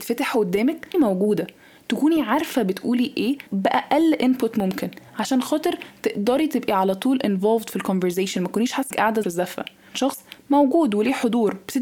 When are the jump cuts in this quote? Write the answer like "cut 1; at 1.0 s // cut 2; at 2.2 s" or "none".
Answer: cut 1; at 0.9 s // cut 2; at 3.5 s // cut 3; at 5.1 s // cut 4; at 8.9 s // cut 5; at 9.2 s // cut 6; at 9.9 s